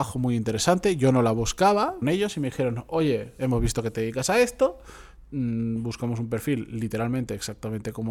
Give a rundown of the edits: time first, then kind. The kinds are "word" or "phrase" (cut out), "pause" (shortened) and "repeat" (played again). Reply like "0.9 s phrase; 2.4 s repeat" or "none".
2.0 s word